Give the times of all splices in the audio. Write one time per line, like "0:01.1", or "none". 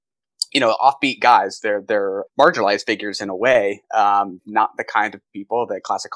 0:02.3
0:04.4